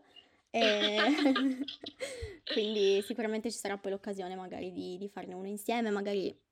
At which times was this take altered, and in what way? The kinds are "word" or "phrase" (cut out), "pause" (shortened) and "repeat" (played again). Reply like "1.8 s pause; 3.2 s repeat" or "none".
none